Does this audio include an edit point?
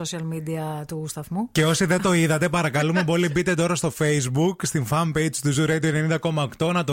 no; 0 cuts

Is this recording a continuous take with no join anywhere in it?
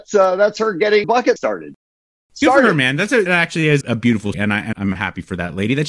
no; 6 cuts; at 1.0 s, 1.4 s, 3.3 s, 3.8 s, 4.3 s, 4.7 s

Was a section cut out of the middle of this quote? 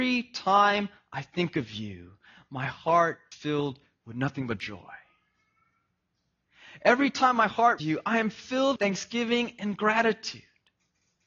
yes; 3 cuts; at 3.3 s, 7.8 s, 8.8 s

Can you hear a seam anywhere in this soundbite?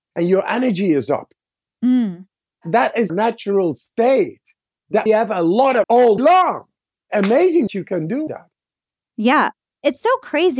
yes; 6 cuts; at 3.1 s, 5.1 s, 5.8 s, 6.2 s, 7.7 s, 8.3 s

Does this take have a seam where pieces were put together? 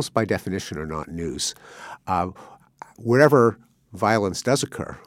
no; 0 cuts

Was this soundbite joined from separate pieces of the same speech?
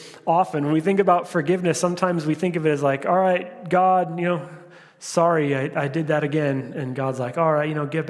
no; 0 cuts

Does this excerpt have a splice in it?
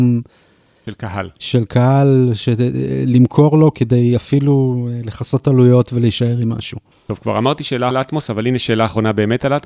yes; 2 cuts; at 6.9 s, 7.9 s

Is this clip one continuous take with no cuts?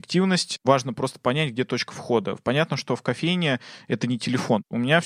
yes; 0 cuts

